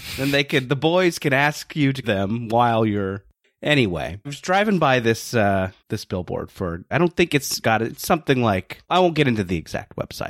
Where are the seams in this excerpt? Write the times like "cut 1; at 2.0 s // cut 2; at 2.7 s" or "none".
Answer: cut 1; at 2.0 s // cut 2; at 4.2 s // cut 3; at 5.8 s // cut 4; at 6.9 s // cut 5; at 7.6 s // cut 6; at 8.8 s